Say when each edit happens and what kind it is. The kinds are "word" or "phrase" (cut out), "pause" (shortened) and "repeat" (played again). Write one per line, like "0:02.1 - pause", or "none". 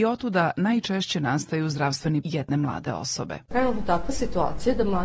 0:02.2 - word

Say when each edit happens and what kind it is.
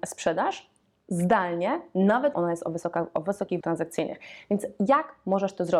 0:02.3 - word
0:03.6 - word

